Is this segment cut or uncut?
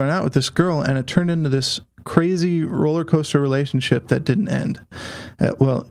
uncut